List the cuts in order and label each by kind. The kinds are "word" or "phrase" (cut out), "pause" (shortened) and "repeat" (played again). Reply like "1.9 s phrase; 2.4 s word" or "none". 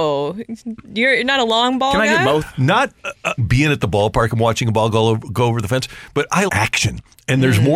3.4 s phrase; 6.5 s word